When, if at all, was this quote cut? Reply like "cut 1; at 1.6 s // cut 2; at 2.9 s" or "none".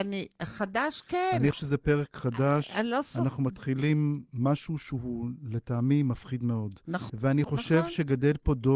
cut 1; at 1.5 s // cut 2; at 4.3 s // cut 3; at 7.1 s